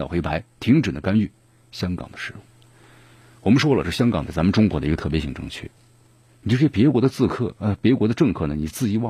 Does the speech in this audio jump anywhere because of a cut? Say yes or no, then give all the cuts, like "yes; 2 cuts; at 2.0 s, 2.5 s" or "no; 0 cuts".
no; 0 cuts